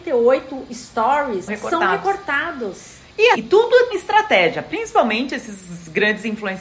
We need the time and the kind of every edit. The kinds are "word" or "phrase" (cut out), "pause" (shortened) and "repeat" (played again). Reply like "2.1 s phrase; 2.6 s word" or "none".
1.5 s word; 3.3 s word; 3.9 s word